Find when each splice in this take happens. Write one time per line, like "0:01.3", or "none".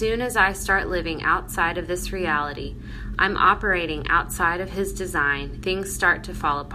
0:05.6